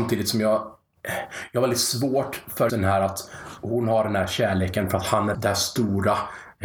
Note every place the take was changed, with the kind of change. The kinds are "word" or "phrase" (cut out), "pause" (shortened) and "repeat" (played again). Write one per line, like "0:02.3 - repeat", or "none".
0:02.7 - word
0:05.3 - phrase